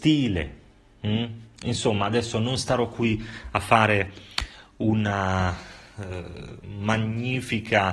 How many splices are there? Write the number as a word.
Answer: zero